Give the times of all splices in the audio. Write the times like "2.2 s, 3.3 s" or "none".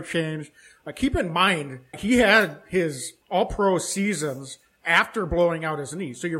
1.9 s, 3.2 s